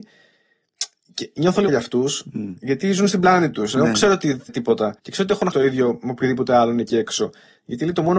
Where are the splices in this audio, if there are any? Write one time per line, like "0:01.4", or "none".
0:01.7
0:04.5
0:05.0
0:05.5